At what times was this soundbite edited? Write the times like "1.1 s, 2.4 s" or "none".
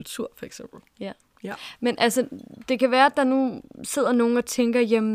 none